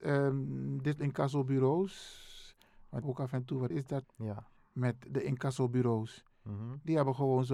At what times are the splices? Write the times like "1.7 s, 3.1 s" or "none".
1.0 s, 3.0 s, 3.7 s, 4.0 s, 4.6 s